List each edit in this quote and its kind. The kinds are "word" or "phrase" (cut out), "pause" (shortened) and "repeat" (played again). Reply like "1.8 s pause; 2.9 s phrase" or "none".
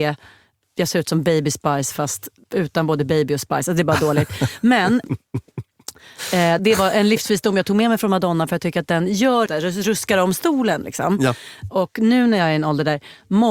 6.6 s word; 9.5 s word